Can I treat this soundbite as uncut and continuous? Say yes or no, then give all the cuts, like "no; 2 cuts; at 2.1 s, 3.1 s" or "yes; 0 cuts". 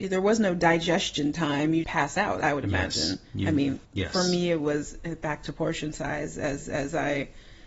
no; 3 cuts; at 1.8 s, 3.8 s, 6.6 s